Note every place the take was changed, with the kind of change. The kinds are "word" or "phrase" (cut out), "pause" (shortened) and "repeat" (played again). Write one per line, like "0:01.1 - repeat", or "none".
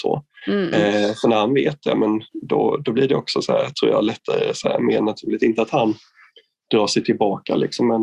none